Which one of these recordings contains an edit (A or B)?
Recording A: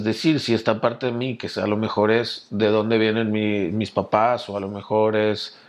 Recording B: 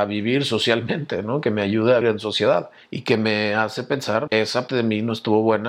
B